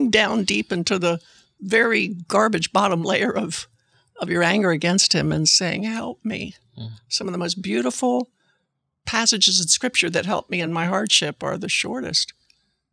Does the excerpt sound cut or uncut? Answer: uncut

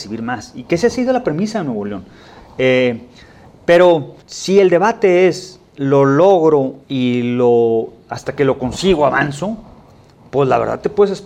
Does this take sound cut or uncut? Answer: cut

